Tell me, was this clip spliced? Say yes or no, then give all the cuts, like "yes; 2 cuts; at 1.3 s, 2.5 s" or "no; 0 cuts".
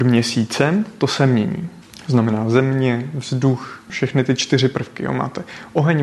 no; 0 cuts